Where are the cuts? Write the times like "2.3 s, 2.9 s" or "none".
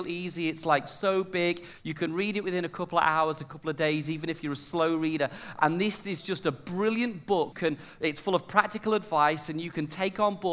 7.5 s